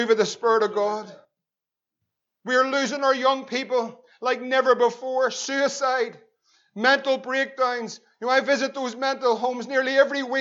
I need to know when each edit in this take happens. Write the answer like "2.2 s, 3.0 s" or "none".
none